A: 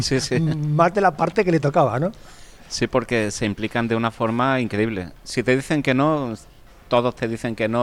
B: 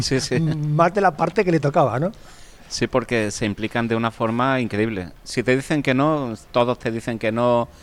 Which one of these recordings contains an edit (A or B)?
B